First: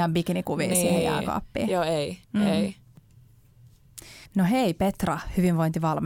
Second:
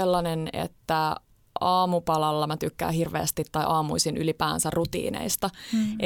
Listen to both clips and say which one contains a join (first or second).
first